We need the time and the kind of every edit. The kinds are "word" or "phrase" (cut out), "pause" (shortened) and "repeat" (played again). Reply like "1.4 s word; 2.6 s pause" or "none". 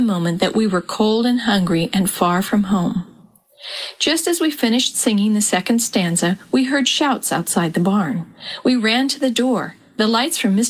none